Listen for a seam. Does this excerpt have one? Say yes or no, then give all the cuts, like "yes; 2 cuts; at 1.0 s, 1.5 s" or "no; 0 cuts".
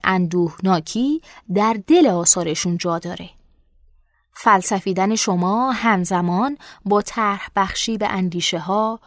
no; 0 cuts